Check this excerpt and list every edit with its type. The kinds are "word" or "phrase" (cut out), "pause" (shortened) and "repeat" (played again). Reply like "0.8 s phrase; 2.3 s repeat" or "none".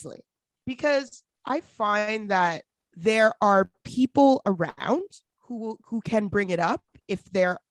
none